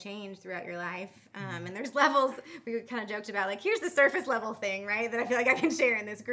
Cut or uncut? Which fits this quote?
uncut